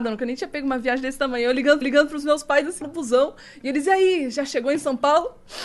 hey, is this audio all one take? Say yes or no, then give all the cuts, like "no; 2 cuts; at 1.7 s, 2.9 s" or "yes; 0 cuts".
no; 2 cuts; at 1.8 s, 2.8 s